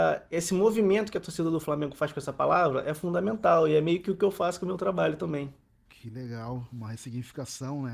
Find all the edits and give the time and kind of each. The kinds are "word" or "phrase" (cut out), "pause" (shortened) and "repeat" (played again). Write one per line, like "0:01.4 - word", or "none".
0:05.9 - pause